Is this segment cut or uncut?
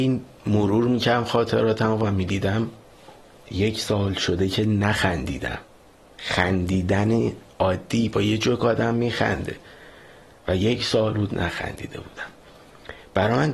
uncut